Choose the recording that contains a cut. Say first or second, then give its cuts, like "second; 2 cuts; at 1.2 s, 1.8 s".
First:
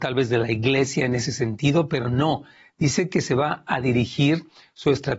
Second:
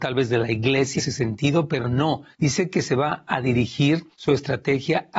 second; 3 cuts; at 1.0 s, 2.3 s, 4.1 s